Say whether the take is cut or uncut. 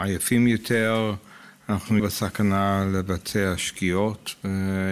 cut